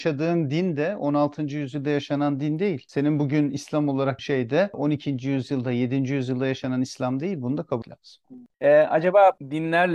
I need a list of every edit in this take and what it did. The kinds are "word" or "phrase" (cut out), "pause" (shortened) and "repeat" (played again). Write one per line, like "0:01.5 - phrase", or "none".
0:04.2 - word
0:07.8 - word